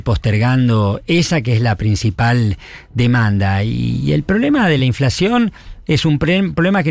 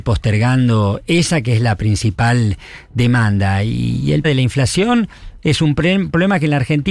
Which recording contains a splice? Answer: second; 1 cut; at 4.2 s

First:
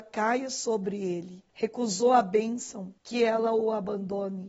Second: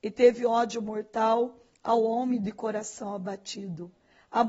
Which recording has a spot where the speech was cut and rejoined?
first; 2 cuts; at 1.5 s, 3.0 s

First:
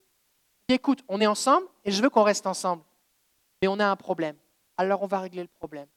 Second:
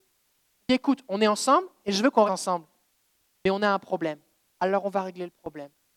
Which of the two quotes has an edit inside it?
second; 1 cut; at 2.3 s

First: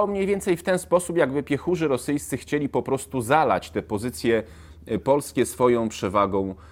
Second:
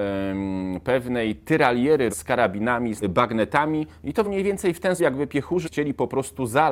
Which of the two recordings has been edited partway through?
second; 5 cuts; at 2.1 s, 3.0 s, 4.2 s, 5.0 s, 5.6 s

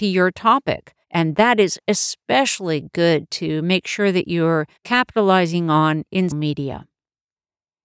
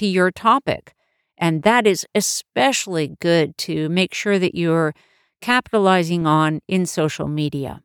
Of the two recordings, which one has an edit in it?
first; 3 cuts; at 1.0 s, 4.8 s, 6.3 s

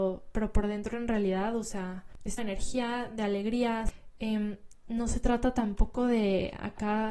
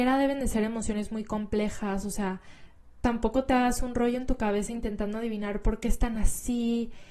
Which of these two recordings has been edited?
first; 1 cut; at 2.4 s

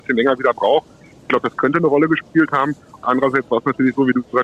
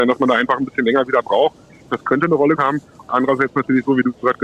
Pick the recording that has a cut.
second; 3 cuts; at 1.9 s, 2.6 s, 3.5 s

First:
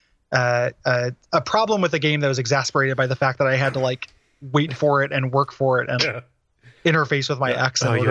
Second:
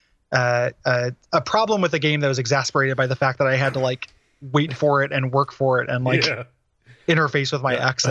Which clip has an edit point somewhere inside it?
first; 1 cut; at 6.0 s

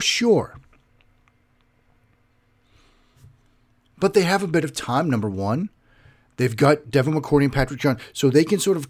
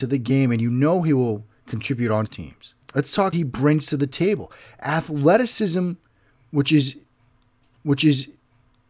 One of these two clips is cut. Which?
second; 4 cuts; at 2.3 s, 2.8 s, 3.3 s, 7.8 s

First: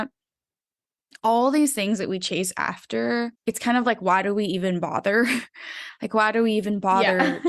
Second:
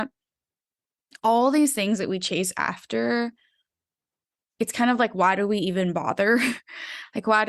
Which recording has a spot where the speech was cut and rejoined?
first; 1 cut; at 3.4 s

